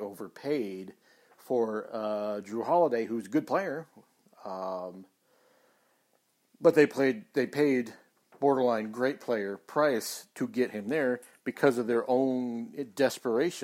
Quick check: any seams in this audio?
no; 0 cuts

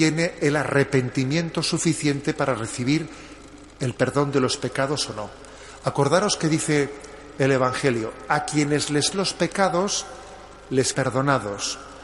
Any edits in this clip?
yes; 2 cuts; at 9.1 s, 10.9 s

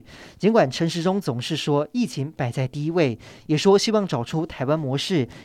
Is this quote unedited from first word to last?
yes; 0 cuts

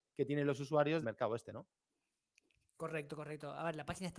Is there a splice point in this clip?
yes; 1 cut; at 1.0 s

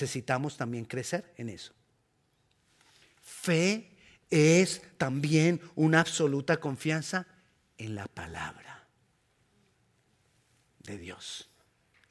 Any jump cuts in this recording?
no; 0 cuts

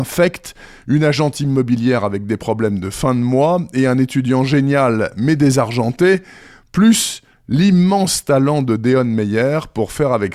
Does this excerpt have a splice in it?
no; 0 cuts

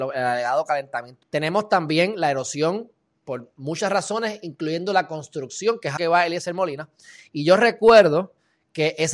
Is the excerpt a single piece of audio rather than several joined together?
no; 2 cuts; at 1.2 s, 6.0 s

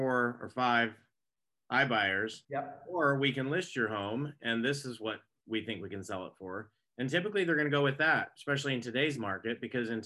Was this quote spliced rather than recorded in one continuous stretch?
yes; 1 cut; at 2.4 s

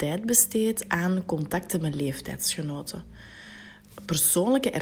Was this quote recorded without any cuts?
yes; 0 cuts

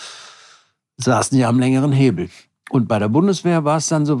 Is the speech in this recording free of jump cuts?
yes; 0 cuts

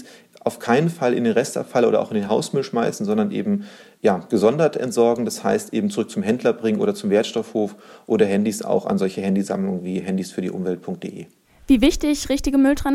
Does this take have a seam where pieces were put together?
no; 0 cuts

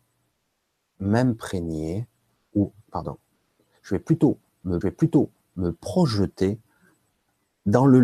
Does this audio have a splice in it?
yes; 2 cuts; at 2.8 s, 4.8 s

